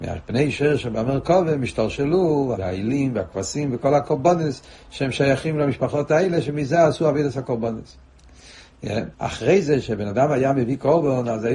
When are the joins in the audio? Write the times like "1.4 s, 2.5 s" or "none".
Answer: 2.6 s, 9.1 s